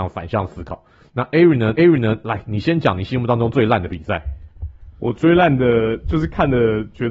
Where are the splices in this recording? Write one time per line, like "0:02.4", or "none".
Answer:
0:01.8
0:04.9

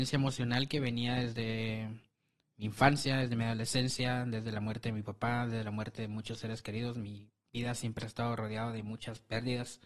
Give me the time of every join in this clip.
none

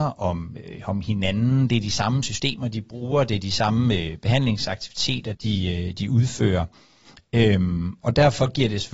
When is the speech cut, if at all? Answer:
0:05.3

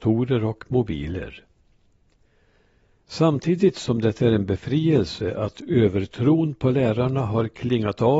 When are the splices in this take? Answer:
none

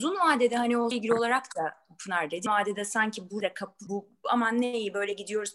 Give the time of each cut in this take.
0:00.9
0:02.5
0:03.4
0:03.9

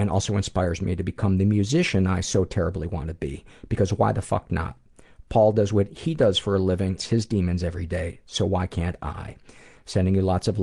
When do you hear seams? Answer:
0:07.0

